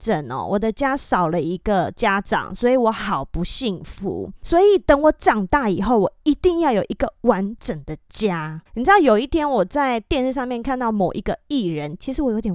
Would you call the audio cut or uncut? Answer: cut